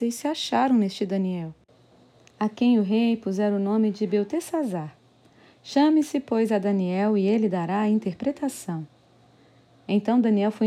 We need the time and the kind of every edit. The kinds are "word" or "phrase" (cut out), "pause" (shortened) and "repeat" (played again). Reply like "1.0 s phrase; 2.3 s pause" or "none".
none